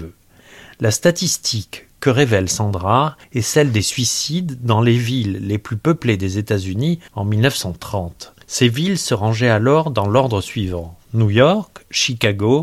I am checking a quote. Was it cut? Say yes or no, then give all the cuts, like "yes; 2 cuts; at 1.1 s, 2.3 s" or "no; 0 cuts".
yes; 3 cuts; at 3.2 s, 7.1 s, 8.4 s